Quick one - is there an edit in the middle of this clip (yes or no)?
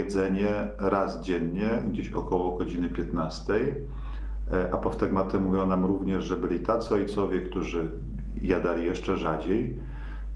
no